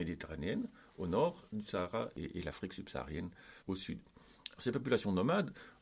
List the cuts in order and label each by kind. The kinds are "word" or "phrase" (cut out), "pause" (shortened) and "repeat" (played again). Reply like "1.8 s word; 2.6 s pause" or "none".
2.1 s word; 3.6 s pause